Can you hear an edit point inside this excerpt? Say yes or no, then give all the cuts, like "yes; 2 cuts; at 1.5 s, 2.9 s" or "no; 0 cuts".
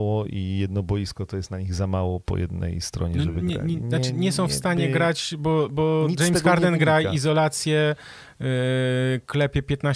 no; 0 cuts